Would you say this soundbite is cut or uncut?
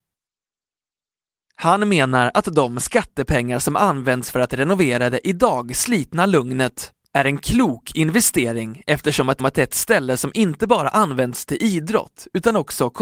cut